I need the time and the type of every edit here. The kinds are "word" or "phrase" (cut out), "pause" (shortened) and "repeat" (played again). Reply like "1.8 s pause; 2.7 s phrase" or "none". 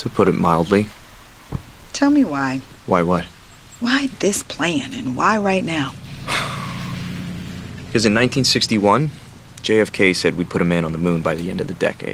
2.8 s pause